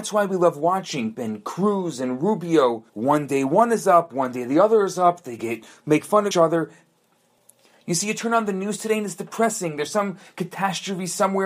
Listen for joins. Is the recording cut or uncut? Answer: cut